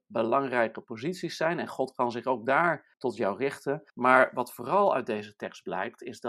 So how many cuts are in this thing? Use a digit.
2